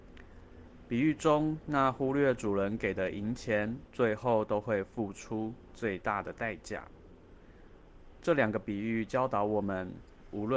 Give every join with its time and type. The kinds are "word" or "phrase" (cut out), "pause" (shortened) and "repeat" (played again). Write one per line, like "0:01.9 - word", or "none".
0:03.9 - phrase